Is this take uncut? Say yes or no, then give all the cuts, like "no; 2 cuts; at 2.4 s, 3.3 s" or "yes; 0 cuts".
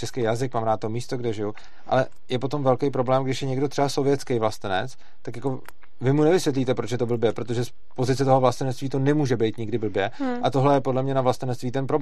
yes; 0 cuts